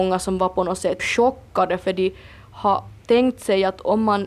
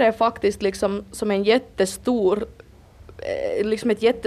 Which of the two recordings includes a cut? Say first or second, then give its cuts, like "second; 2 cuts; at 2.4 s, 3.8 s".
first; 2 cuts; at 1.0 s, 3.0 s